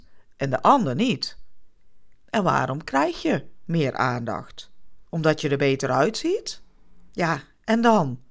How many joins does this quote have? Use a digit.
2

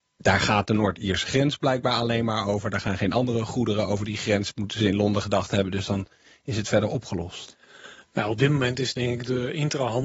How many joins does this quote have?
0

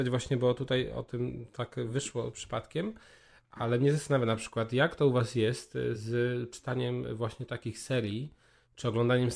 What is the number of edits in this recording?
0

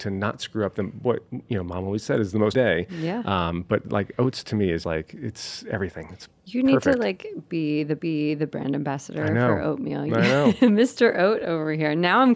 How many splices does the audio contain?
3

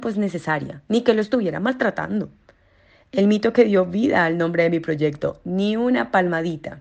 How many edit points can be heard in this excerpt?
0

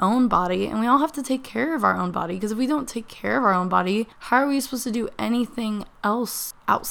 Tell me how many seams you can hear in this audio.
1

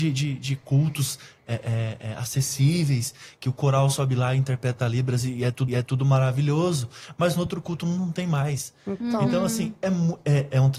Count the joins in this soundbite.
1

